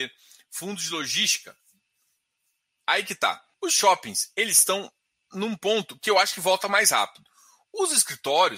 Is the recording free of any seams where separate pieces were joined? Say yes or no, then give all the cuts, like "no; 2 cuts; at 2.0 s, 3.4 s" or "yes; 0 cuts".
no; 1 cut; at 3.5 s